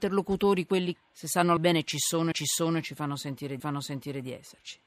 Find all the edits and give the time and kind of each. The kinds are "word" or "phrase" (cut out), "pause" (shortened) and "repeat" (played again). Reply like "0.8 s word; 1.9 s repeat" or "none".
1.0 s word; 1.6 s word; 2.3 s repeat; 3.6 s repeat